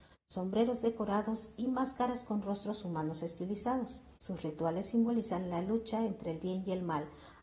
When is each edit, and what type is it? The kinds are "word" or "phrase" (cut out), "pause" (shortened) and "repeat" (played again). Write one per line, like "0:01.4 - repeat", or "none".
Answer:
0:04.1 - pause